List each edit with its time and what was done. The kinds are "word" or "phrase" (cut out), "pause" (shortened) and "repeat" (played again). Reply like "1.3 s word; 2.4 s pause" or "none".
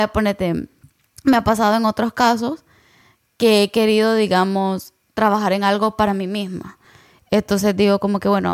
none